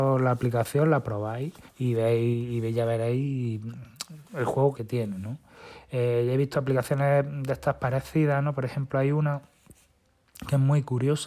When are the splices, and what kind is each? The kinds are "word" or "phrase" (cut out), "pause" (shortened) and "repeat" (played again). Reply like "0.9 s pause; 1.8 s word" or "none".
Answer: 1.7 s pause; 4.7 s word